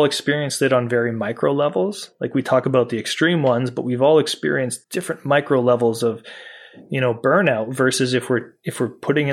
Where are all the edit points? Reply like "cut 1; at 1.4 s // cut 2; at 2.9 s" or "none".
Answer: cut 1; at 4.8 s